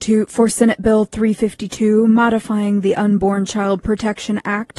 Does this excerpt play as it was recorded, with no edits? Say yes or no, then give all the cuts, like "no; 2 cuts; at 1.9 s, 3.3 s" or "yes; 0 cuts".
yes; 0 cuts